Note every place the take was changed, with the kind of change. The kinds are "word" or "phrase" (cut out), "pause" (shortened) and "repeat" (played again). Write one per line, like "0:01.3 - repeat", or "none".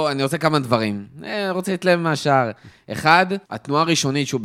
0:03.4 - pause